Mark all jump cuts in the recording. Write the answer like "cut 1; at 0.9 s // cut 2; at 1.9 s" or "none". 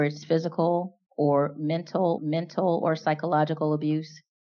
cut 1; at 2.2 s